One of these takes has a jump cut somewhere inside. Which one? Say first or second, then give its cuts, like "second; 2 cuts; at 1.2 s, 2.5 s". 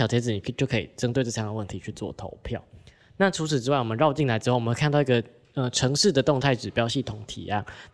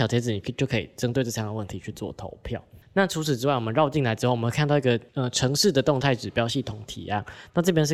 second; 2 cuts; at 2.8 s, 5.1 s